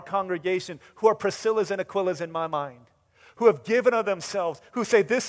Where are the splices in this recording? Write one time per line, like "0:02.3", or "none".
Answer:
none